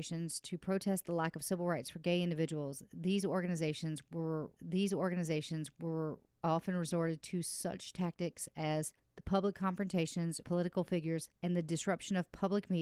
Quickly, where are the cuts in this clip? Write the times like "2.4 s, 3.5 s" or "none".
4.6 s, 9.0 s, 10.4 s, 11.4 s